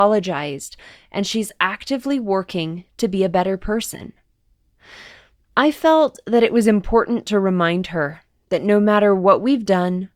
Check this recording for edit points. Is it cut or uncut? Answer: uncut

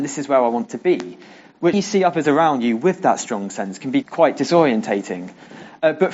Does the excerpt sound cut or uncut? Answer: cut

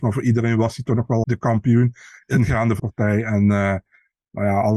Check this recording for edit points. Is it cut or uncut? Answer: cut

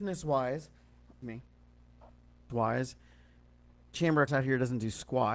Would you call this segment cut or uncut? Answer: cut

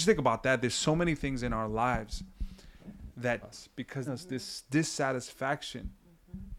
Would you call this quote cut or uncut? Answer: cut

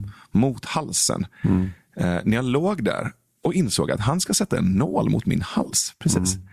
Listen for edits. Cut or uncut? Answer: uncut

